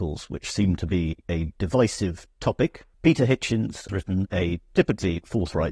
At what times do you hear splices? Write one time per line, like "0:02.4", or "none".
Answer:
0:02.9
0:03.9